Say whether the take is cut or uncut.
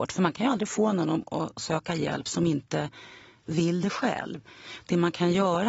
uncut